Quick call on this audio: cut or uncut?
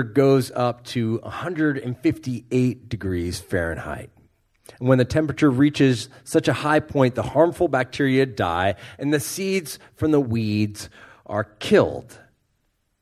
uncut